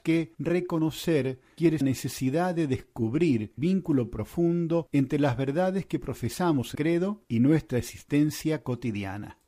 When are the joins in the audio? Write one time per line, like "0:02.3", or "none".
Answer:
0:01.8
0:03.6
0:06.7